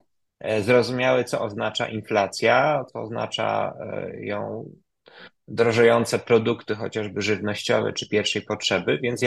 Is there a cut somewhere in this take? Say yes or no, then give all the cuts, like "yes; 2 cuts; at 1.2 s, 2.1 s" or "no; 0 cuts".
no; 0 cuts